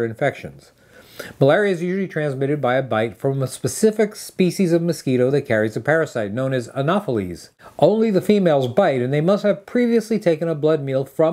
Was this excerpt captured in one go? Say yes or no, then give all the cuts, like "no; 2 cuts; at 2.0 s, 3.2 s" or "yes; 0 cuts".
yes; 0 cuts